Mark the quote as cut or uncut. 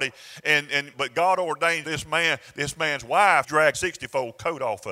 cut